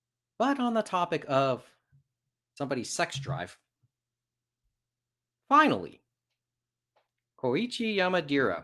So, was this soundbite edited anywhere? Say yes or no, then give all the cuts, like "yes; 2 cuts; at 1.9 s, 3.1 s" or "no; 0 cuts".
no; 0 cuts